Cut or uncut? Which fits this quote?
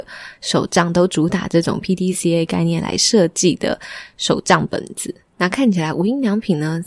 uncut